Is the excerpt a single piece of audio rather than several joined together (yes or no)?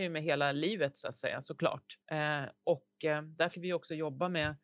no